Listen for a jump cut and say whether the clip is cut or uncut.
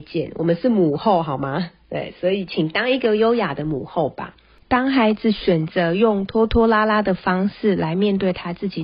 uncut